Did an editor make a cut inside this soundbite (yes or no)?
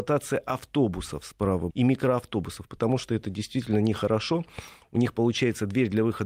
yes